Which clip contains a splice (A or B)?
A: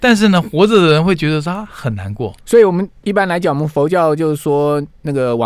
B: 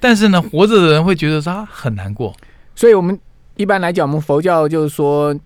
A